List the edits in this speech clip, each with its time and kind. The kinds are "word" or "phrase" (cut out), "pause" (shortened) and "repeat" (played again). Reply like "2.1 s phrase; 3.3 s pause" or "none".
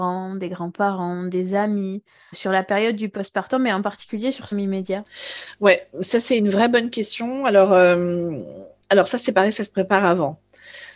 2.3 s word; 4.5 s phrase; 8.8 s pause

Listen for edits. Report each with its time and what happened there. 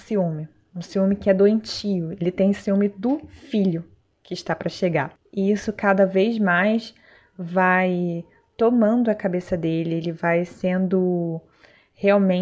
none

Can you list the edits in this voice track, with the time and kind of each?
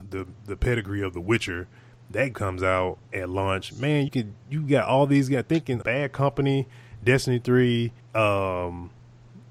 2.3 s word; 3.0 s pause; 4.1 s word; 5.8 s word; 8.0 s pause

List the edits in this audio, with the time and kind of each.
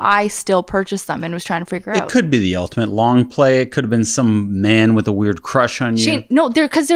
none

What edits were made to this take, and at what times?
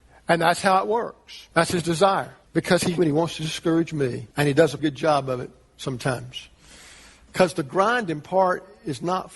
1.5 s pause; 2.5 s pause; 3.0 s phrase; 4.3 s pause; 4.8 s word

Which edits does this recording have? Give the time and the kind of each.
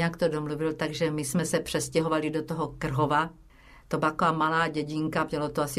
none

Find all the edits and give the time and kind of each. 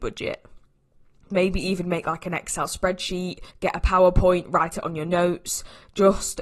3.5 s pause

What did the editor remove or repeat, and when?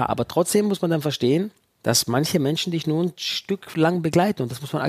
1.6 s pause

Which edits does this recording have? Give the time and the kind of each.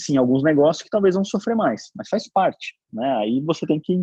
none

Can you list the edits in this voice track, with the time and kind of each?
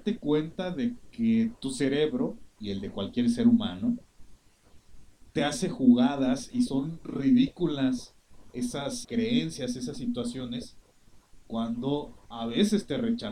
2.5 s pause; 9.0 s word

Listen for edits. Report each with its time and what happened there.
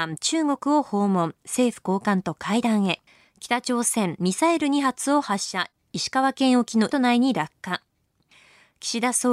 3.1 s pause; 6.9 s word

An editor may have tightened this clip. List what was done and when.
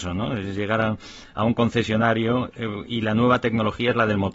none

